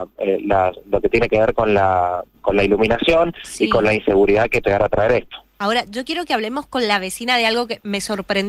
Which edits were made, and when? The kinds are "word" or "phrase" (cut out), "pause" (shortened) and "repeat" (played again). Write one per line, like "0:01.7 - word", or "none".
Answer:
0:02.4 - word
0:04.6 - word